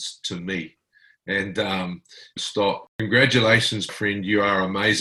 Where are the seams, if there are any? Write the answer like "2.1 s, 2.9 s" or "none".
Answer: 2.4 s, 3.9 s